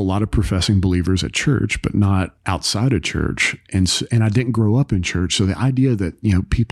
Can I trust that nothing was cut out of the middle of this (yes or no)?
yes